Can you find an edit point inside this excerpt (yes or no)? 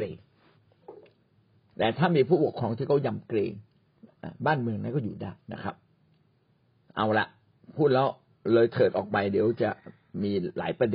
yes